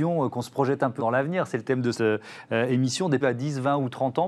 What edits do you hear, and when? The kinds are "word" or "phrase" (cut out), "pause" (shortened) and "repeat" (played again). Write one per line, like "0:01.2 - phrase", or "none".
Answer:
0:01.0 - word
0:01.9 - word
0:03.2 - word